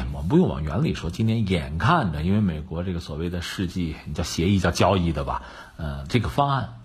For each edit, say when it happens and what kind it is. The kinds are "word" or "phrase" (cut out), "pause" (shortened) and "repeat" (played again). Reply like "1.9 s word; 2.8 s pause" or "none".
none

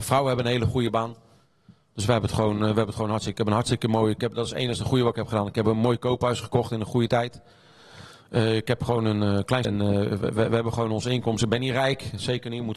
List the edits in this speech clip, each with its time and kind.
9.6 s word

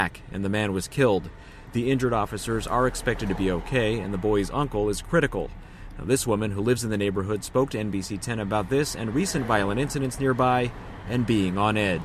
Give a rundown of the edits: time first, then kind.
none

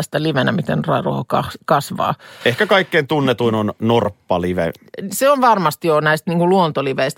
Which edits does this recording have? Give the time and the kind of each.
none

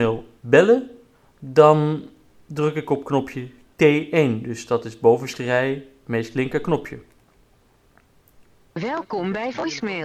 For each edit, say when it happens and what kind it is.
1.1 s pause

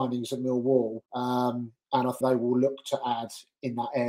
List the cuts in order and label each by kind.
1.1 s pause; 2.2 s phrase

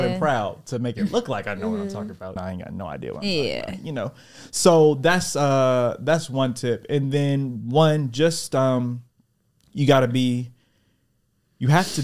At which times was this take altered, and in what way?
2.4 s word

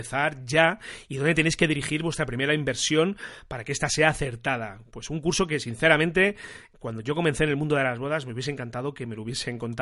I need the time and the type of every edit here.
none

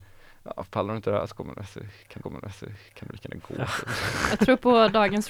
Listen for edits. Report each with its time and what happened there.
2.2 s repeat

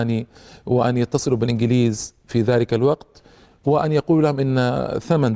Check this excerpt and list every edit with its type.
none

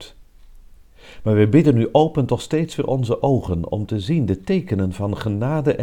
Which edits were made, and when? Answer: none

